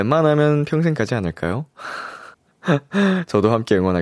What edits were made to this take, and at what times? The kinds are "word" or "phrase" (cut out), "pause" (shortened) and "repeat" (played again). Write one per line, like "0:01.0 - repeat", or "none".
0:02.3 - pause